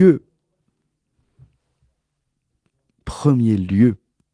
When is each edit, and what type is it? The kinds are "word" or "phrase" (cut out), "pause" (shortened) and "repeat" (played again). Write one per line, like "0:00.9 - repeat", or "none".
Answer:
none